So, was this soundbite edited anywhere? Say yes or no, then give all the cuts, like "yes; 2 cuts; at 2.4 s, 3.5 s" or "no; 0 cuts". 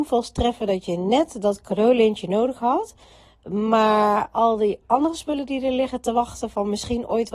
no; 0 cuts